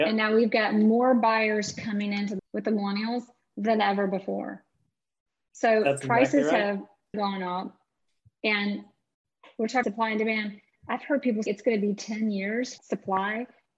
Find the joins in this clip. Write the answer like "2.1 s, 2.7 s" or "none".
2.4 s, 7.1 s, 9.8 s, 11.5 s, 12.8 s